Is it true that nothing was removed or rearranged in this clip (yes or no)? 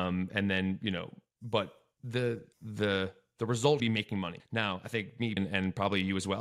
no